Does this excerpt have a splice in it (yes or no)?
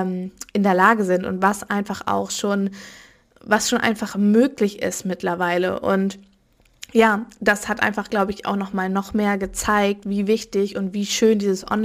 no